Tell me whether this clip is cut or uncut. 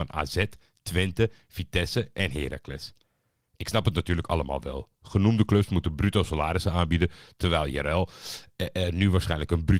uncut